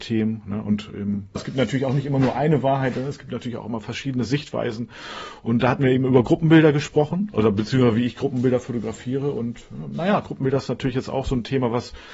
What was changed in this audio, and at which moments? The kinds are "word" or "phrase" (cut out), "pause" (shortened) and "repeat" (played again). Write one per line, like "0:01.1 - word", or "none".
0:01.4 - word

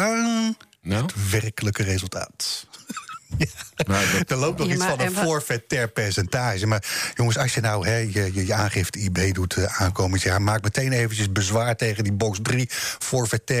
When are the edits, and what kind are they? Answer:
none

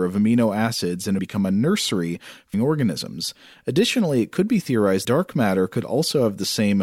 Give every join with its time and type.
0:01.2 - word
0:02.5 - word
0:05.0 - word

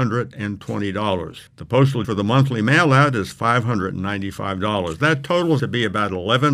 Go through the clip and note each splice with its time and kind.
0:01.5 - pause
0:02.0 - word
0:05.6 - word

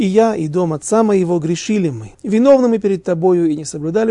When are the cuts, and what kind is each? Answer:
0:02.1 - pause

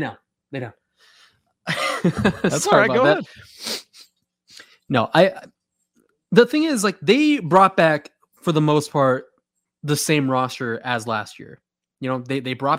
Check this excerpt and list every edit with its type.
none

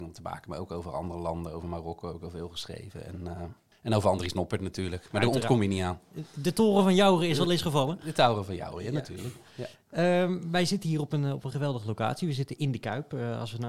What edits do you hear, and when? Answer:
0:03.7 - pause

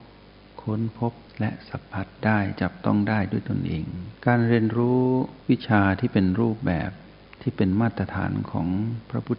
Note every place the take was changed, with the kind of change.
0:01.3 - pause
0:04.2 - pause
0:05.4 - pause
0:07.3 - pause

